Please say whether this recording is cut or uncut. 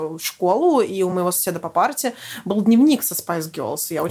uncut